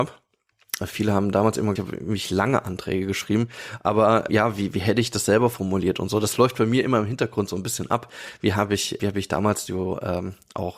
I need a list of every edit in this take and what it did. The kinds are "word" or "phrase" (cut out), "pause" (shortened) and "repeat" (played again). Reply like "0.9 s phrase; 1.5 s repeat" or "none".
1.8 s phrase; 4.3 s word; 9.0 s word